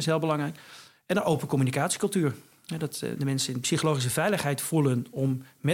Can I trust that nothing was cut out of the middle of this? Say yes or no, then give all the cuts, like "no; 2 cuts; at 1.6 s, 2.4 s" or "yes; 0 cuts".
yes; 0 cuts